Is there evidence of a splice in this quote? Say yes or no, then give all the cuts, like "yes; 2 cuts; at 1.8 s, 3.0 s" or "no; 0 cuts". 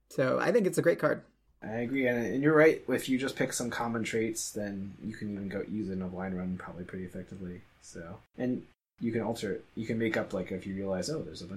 no; 0 cuts